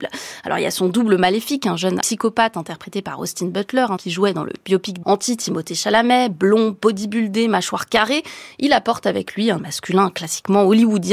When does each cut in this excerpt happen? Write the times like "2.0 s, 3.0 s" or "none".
2.0 s, 4.0 s, 5.0 s, 9.6 s